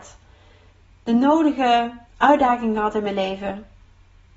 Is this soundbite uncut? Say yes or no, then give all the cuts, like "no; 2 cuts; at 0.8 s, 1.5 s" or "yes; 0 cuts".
no; 1 cut; at 2.1 s